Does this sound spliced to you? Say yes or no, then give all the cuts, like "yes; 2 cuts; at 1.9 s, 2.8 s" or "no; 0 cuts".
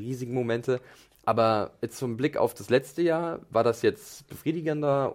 no; 0 cuts